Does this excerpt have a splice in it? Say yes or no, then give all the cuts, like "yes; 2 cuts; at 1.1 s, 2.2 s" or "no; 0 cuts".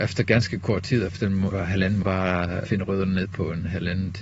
yes; 4 cuts; at 1.1 s, 1.5 s, 2.0 s, 2.7 s